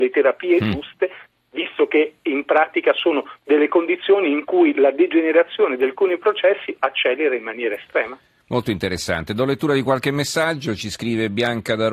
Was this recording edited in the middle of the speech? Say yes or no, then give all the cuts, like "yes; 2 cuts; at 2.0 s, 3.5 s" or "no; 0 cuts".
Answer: no; 0 cuts